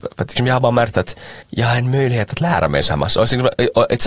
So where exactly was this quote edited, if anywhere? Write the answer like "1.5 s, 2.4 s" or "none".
1.4 s